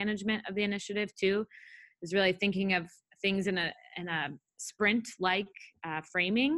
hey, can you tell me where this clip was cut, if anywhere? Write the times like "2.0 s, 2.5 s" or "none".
none